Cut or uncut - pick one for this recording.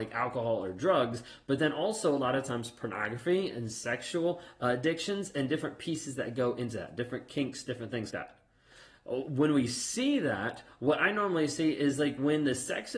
cut